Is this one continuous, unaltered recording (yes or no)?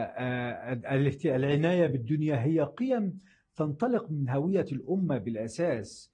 yes